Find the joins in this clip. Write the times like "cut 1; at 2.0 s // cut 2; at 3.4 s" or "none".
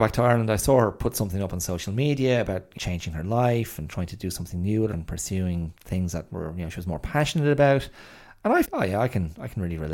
cut 1; at 2.8 s // cut 2; at 4.9 s // cut 3; at 5.8 s // cut 4; at 8.6 s